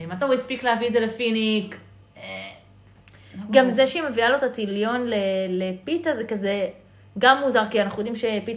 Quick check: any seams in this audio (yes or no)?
no